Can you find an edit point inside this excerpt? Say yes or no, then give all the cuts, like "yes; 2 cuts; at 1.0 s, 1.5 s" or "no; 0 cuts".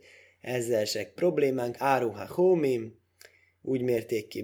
yes; 2 cuts; at 1.2 s, 1.8 s